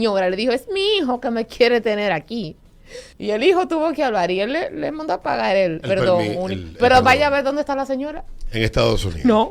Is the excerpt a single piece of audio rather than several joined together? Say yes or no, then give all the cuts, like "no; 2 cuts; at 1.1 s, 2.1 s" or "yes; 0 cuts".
no; 2 cuts; at 3.1 s, 5.8 s